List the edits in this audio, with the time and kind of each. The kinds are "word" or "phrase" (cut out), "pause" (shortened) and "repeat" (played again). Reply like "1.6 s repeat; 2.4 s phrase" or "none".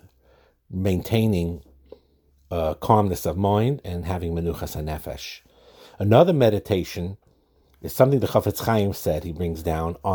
none